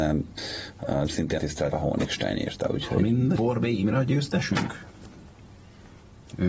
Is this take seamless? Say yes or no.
no